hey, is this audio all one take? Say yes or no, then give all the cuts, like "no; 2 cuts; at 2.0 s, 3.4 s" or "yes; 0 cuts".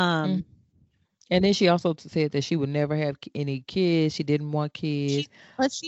yes; 0 cuts